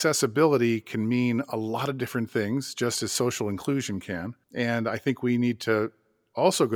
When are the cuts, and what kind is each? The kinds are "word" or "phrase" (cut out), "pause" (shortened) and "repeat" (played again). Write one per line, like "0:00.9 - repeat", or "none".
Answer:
0:04.4 - pause